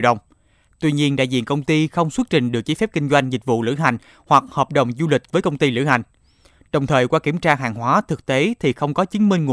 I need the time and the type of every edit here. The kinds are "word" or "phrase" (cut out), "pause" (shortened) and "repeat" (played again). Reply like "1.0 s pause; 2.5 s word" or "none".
none